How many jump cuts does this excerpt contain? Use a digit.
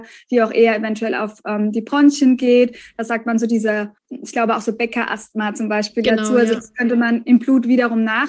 1